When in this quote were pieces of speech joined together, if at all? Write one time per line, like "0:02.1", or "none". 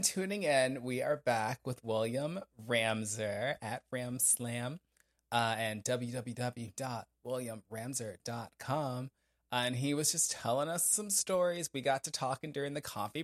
none

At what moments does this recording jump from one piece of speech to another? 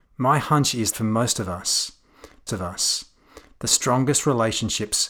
0:00.9
0:02.5

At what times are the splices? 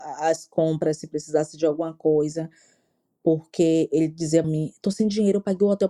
0:04.4

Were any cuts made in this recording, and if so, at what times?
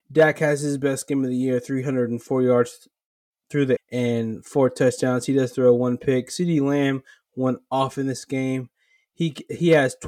0:03.8

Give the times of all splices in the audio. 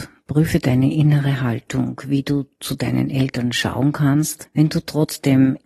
none

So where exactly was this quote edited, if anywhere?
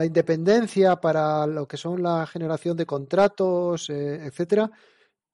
none

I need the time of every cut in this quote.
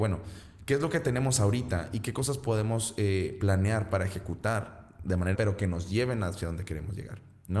0:05.3

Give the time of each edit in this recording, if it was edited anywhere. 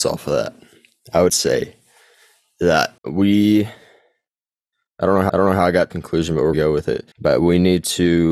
0:01.3
0:03.0
0:05.3
0:05.9
0:06.5
0:07.1

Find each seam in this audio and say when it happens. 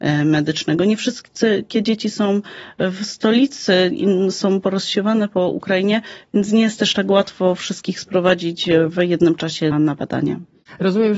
0:09.7

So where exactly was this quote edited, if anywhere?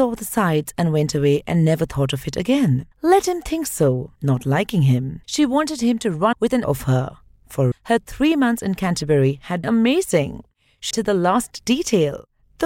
0:02.9
0:04.2
0:05.2
0:06.3
0:06.6
0:07.7
0:09.6
0:10.9

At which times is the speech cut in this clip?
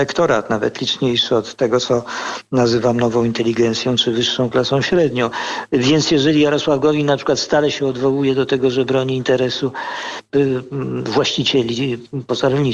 0:10.3

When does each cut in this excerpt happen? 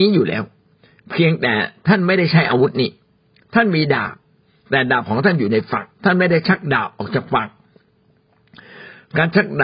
0:05.9

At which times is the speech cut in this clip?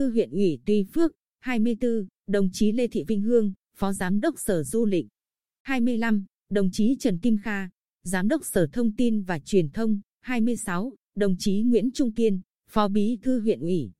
none

